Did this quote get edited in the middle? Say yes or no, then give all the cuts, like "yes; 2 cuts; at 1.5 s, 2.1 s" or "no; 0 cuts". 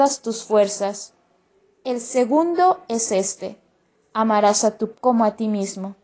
yes; 1 cut; at 4.9 s